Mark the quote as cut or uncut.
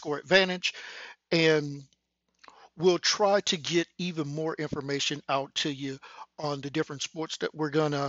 uncut